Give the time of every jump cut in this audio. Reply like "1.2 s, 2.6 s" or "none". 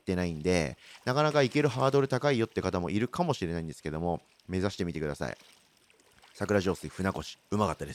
none